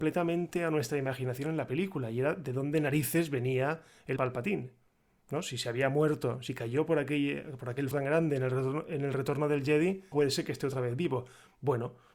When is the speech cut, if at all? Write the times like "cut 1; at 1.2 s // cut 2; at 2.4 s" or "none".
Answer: cut 1; at 4.2 s // cut 2; at 7.9 s // cut 3; at 10.1 s